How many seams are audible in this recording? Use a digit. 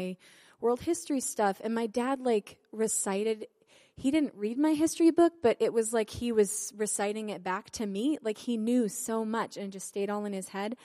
0